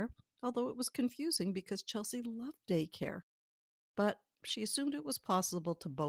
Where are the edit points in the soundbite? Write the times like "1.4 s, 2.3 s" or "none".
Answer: none